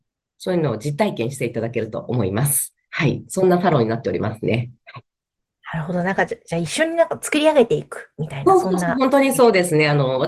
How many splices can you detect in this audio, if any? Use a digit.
0